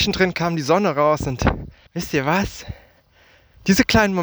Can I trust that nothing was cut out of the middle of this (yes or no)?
no